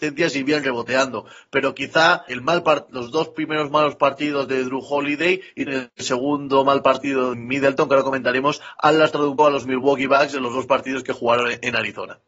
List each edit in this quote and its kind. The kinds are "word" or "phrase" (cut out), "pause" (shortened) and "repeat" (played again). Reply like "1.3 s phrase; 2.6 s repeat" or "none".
2.3 s word; 5.7 s word; 7.3 s word; 9.4 s word